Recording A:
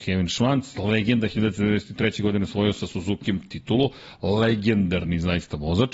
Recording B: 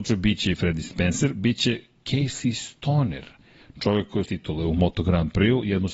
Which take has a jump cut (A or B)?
B